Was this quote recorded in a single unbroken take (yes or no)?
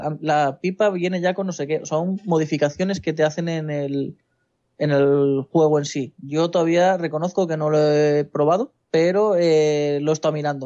no